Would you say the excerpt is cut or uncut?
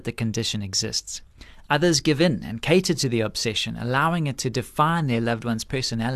uncut